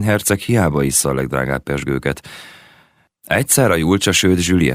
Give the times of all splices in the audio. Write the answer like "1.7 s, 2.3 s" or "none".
none